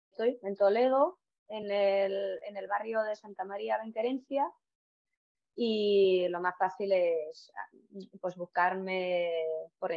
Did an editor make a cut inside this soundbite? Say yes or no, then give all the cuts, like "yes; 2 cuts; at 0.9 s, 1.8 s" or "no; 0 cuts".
no; 0 cuts